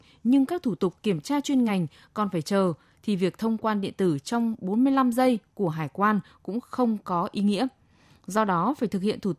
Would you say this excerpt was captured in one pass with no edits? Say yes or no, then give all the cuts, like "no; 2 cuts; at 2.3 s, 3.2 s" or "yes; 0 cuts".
yes; 0 cuts